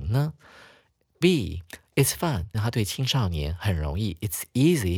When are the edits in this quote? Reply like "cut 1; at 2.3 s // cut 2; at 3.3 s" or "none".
cut 1; at 2.5 s

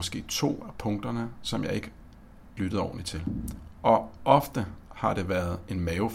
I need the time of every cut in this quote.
cut 1; at 2.6 s

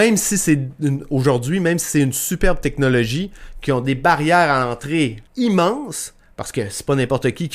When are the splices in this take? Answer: cut 1; at 5.3 s

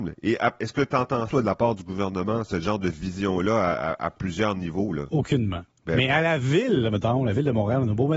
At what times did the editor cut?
cut 1; at 1.3 s

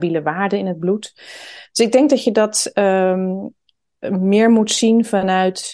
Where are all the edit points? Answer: none

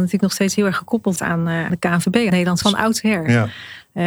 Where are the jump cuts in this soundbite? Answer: cut 1; at 1.2 s // cut 2; at 1.7 s // cut 3; at 2.3 s // cut 4; at 2.6 s

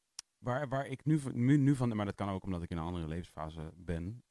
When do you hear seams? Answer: cut 1; at 1.0 s

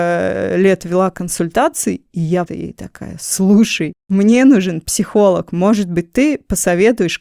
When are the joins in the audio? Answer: cut 1; at 2.5 s

